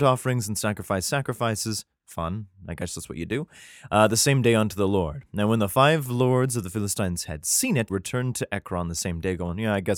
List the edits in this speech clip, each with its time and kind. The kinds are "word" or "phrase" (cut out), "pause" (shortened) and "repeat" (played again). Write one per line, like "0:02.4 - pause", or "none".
0:07.9 - word